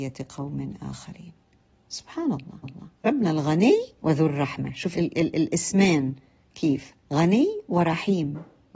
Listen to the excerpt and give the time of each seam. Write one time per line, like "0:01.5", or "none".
0:02.6
0:04.0
0:04.9
0:07.0